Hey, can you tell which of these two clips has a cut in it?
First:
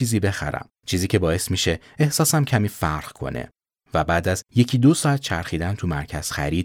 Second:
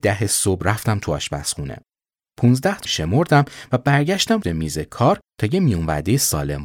second; 2 cuts; at 2.8 s, 4.4 s

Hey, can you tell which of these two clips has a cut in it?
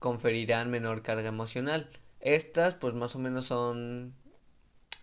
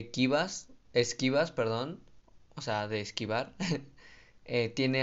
first; 1 cut; at 2.1 s

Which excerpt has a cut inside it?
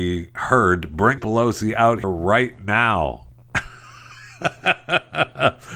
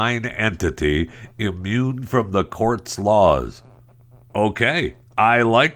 first; 2 cuts; at 1.2 s, 2.0 s

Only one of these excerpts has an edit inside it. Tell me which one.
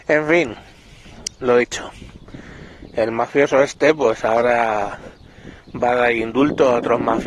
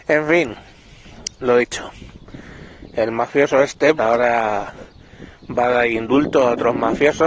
second; 1 cut; at 4.0 s

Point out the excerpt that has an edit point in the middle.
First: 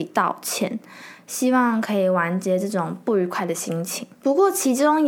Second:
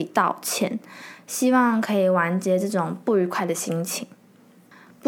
first; 1 cut; at 4.1 s

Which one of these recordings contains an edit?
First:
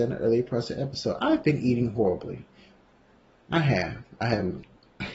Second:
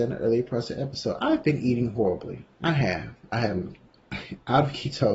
second; 1 cut; at 2.5 s

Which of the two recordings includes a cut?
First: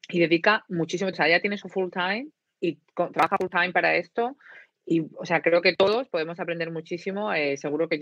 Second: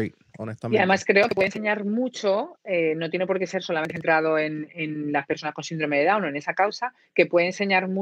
first; 2 cuts; at 1.1 s, 1.6 s

